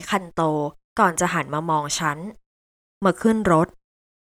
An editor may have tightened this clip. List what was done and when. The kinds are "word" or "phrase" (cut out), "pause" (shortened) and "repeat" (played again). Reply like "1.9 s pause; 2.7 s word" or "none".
none